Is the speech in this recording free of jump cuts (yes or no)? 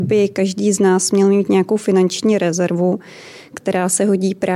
yes